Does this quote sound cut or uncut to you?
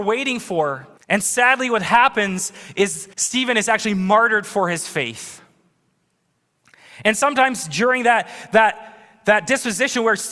cut